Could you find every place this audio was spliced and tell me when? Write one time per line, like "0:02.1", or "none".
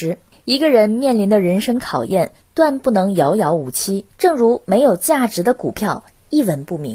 0:04.1